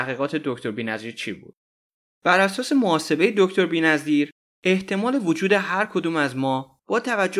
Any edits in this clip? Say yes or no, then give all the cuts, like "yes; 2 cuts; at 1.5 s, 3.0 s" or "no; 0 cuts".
no; 0 cuts